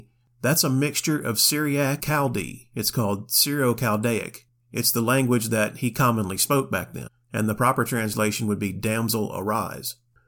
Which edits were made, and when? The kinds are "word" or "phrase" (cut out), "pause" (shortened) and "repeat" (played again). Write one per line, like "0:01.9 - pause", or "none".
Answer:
0:02.0 - word